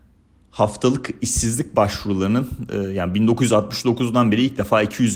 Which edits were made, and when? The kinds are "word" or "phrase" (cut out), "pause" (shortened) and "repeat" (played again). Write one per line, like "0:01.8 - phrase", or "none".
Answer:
none